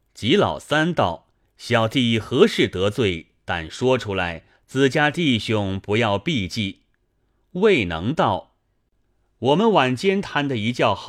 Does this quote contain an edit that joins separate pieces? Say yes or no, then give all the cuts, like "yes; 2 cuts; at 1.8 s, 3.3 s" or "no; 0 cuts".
no; 0 cuts